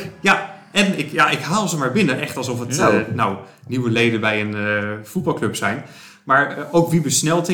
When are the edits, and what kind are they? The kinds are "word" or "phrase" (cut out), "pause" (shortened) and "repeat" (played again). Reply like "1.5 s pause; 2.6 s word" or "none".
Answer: none